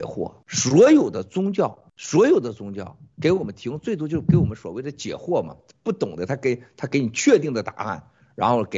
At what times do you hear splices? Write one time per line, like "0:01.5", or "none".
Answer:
none